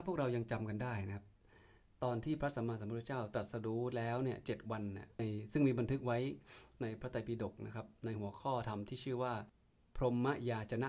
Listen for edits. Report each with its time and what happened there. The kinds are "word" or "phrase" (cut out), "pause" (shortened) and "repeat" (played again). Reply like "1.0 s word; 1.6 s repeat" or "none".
none